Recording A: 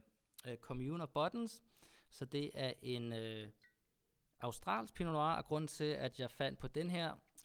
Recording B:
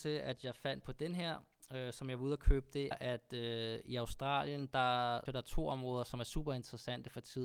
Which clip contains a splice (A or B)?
B